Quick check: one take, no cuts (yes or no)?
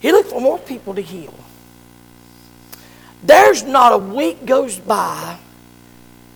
yes